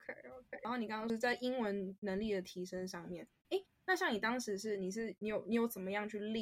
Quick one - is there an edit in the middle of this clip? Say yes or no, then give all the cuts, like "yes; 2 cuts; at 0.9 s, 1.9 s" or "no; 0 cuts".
no; 0 cuts